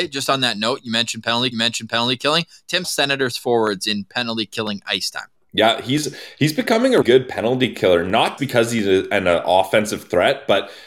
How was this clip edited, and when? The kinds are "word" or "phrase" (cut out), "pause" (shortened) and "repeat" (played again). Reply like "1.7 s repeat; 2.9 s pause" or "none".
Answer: 1.5 s repeat; 2.8 s phrase; 5.4 s pause; 7.0 s word; 8.4 s word